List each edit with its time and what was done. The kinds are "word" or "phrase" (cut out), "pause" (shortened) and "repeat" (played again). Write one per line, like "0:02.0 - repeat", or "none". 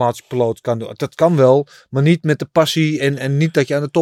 none